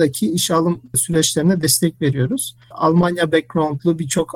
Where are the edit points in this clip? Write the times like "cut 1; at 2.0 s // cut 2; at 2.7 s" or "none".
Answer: none